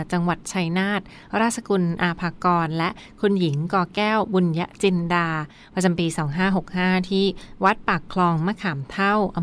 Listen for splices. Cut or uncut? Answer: uncut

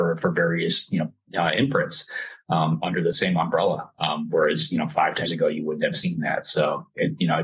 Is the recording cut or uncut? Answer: cut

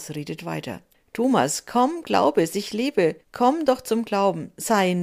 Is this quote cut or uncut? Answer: cut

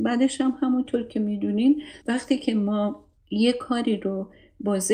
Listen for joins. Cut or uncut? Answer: cut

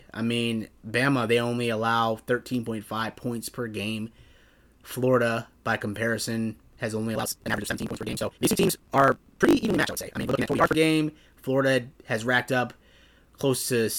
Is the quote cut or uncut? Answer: cut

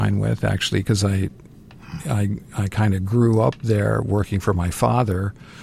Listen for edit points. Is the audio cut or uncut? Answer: uncut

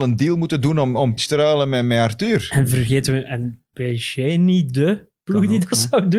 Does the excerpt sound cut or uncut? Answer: cut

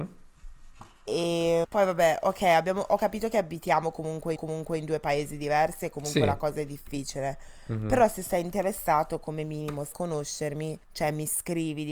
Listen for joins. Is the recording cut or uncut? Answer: cut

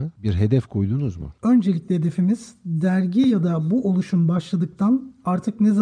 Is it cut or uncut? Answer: uncut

